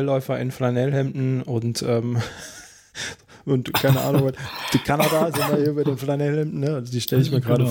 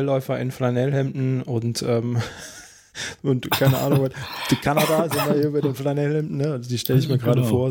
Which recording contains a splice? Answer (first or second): second